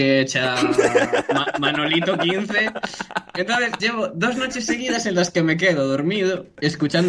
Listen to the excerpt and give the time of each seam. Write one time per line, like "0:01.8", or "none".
0:03.8